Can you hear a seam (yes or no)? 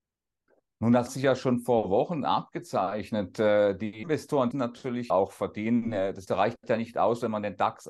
yes